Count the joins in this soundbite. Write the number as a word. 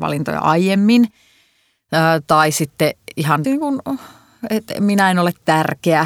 one